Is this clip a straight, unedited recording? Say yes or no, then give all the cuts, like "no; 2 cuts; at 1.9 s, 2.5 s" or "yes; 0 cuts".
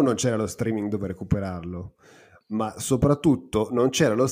yes; 0 cuts